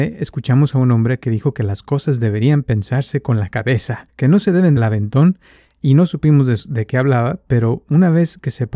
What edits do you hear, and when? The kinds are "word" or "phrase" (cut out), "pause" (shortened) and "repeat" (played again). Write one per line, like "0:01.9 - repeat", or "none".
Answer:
0:04.1 - pause
0:04.8 - phrase